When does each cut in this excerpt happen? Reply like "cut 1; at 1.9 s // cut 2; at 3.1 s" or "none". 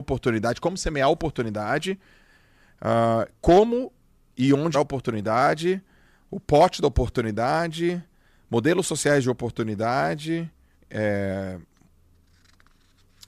cut 1; at 3.4 s // cut 2; at 4.7 s // cut 3; at 10.7 s